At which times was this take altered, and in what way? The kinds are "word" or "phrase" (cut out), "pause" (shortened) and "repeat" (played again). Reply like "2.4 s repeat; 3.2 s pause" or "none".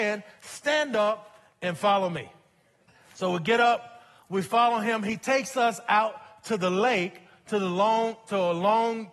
2.9 s pause